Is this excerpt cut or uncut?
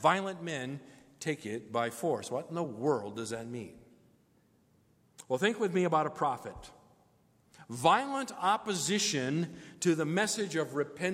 uncut